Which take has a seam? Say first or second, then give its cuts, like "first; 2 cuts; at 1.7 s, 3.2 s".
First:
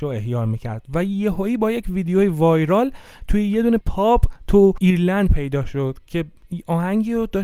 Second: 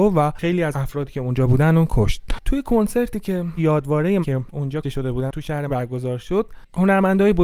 second; 4 cuts; at 3.6 s, 4.2 s, 4.8 s, 5.7 s